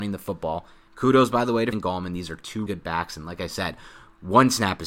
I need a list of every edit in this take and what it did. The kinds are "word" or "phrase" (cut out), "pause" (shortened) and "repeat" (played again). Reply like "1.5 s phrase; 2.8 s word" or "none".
1.7 s word; 2.7 s word